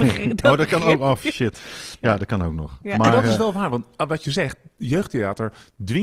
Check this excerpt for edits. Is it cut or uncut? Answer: uncut